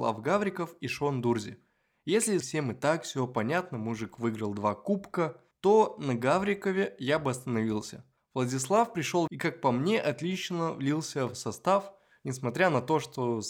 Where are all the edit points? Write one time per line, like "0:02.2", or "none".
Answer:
0:02.4
0:05.5
0:08.2
0:09.3